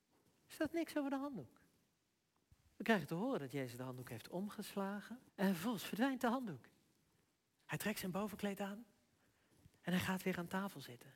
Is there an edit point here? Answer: yes; 1 cut; at 5.3 s

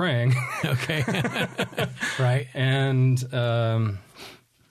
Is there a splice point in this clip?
no; 0 cuts

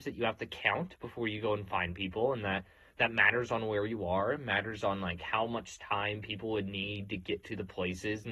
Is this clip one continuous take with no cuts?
yes; 0 cuts

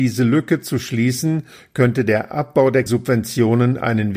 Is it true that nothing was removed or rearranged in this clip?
no; 1 cut; at 2.9 s

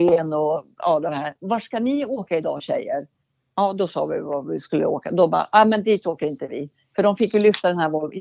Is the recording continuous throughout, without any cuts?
yes; 0 cuts

